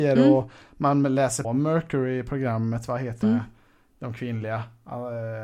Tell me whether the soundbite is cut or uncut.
cut